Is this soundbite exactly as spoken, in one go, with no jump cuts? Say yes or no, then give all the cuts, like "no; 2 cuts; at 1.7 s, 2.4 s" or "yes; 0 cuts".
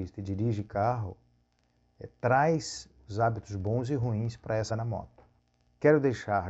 no; 1 cut; at 4.7 s